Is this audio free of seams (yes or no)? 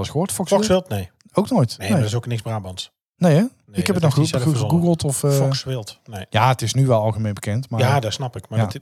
yes